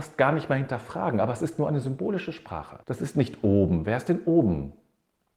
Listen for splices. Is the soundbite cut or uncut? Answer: cut